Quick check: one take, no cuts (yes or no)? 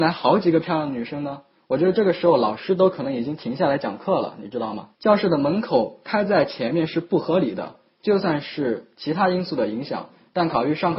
no